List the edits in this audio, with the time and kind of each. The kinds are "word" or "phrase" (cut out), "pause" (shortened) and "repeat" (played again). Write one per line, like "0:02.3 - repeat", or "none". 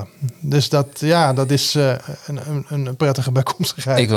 none